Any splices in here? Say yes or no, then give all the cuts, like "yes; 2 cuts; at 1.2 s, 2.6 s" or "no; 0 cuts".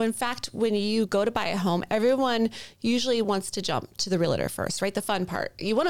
no; 0 cuts